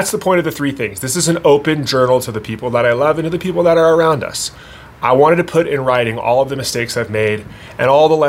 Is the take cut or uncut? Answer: uncut